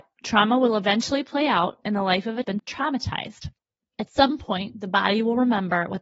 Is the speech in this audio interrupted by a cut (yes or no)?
yes